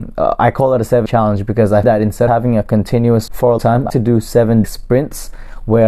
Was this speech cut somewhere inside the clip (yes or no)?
yes